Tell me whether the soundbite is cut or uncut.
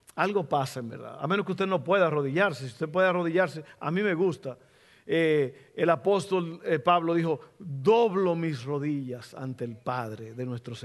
uncut